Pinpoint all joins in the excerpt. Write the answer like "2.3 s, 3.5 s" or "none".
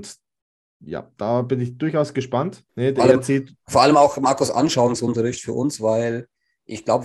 2.7 s